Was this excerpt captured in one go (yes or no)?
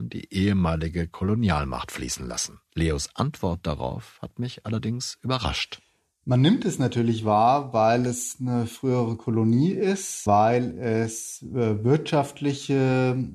yes